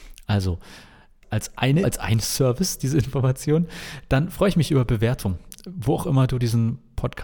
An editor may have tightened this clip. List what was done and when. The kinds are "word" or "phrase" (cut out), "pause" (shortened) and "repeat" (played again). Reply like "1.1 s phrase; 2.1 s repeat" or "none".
1.2 s word; 1.8 s word